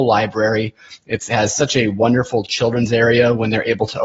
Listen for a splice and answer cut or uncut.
uncut